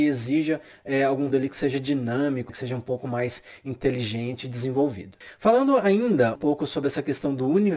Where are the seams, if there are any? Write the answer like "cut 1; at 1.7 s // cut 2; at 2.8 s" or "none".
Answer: cut 1; at 1.3 s // cut 2; at 2.5 s // cut 3; at 6.4 s